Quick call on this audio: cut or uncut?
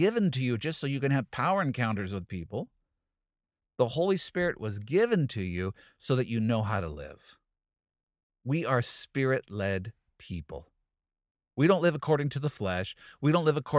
uncut